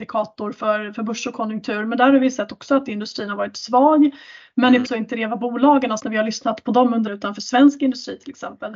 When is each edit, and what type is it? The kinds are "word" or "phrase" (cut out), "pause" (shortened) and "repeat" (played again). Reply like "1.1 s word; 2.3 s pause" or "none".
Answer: 4.8 s word; 6.0 s word; 7.1 s word